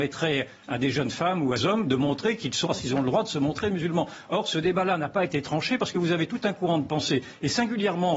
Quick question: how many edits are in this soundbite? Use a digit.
2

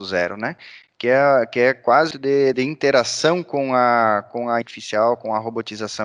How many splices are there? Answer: 3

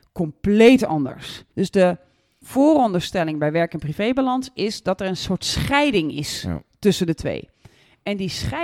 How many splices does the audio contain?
1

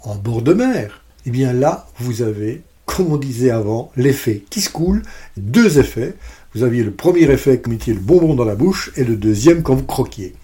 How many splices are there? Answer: 2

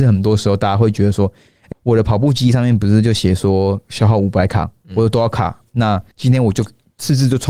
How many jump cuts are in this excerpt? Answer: 2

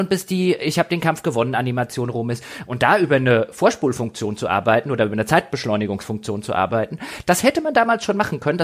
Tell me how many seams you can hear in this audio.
0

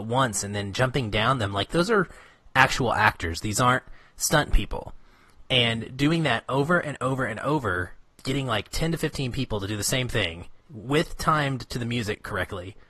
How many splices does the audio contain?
2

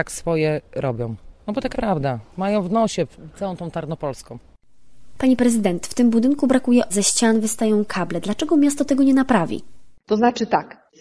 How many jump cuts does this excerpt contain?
2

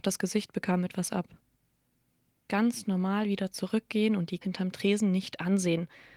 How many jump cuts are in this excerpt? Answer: 2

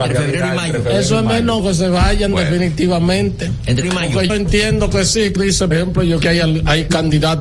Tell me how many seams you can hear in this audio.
6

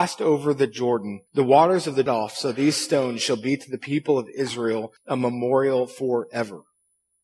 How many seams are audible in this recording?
3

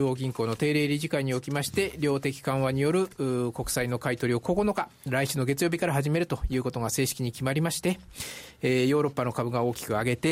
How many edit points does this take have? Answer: 0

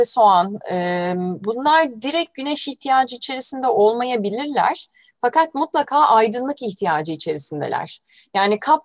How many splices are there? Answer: 0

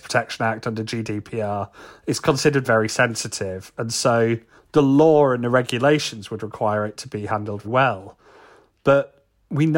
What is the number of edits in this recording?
3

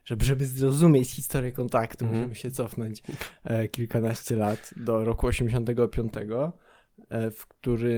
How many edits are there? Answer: 0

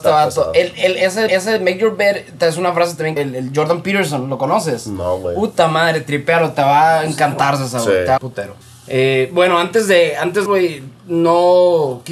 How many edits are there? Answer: 5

